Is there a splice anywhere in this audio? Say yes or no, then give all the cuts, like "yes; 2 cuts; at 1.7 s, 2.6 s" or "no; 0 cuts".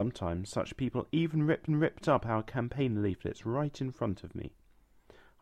yes; 1 cut; at 1.7 s